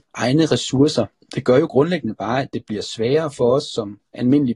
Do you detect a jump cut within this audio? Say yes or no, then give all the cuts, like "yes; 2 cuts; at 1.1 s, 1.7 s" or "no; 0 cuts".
yes; 1 cut; at 1.1 s